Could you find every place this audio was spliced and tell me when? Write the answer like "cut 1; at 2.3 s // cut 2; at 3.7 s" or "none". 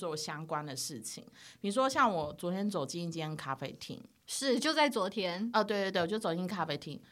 none